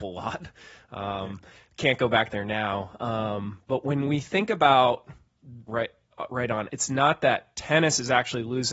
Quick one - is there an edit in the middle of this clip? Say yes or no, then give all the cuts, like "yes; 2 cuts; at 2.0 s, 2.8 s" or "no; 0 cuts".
yes; 3 cuts; at 1.5 s, 5.7 s, 6.7 s